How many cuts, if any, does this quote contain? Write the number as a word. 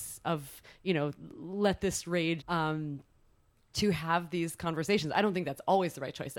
one